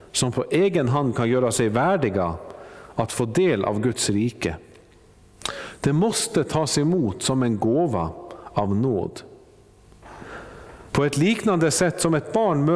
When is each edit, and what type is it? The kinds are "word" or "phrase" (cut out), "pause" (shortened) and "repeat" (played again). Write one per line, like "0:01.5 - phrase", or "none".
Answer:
0:10.9 - pause

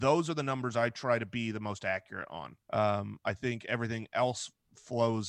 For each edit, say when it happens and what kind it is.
0:02.6 - pause

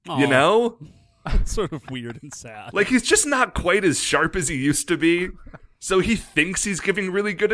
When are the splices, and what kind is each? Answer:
none

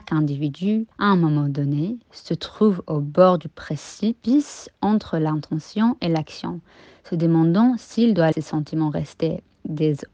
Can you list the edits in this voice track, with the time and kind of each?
0:00.9 - pause
0:08.3 - word

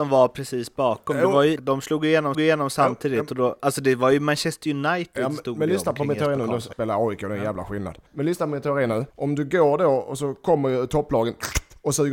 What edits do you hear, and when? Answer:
0:01.6 - word
0:02.3 - repeat
0:06.7 - word
0:08.1 - pause
0:09.1 - pause

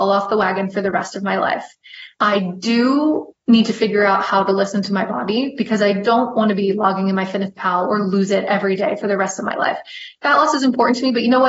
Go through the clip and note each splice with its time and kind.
0:02.1 - pause

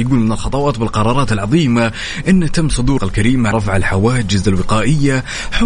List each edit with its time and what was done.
0:03.0 - word
0:03.5 - word

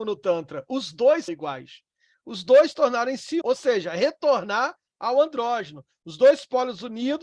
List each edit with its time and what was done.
0:01.3 - word
0:03.4 - word

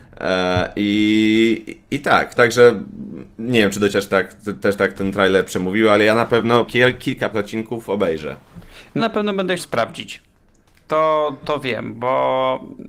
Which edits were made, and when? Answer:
0:02.4 - word
0:03.9 - word
0:04.9 - word
0:06.7 - word
0:07.3 - word
0:09.0 - word
0:09.6 - word
0:11.4 - word

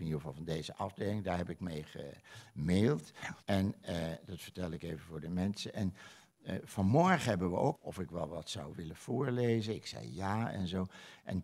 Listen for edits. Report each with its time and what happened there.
0:03.4 - pause
0:07.7 - phrase

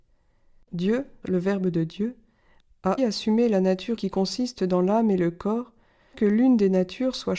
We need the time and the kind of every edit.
0:01.2 - word
0:03.0 - word
0:04.0 - word
0:06.1 - word

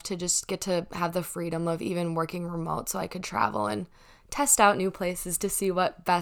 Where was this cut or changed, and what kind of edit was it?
none

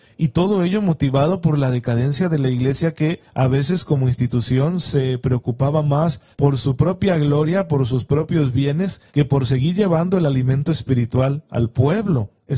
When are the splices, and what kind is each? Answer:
0:03.3 - pause
0:06.3 - pause
0:09.1 - pause

